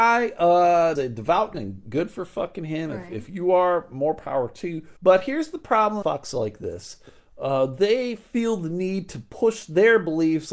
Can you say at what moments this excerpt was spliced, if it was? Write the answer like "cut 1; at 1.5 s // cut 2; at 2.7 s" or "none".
cut 1; at 1.0 s // cut 2; at 1.5 s // cut 3; at 5.0 s // cut 4; at 6.0 s